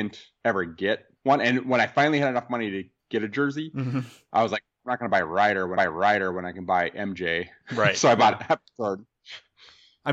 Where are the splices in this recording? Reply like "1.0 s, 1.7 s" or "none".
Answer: 1.2 s, 5.8 s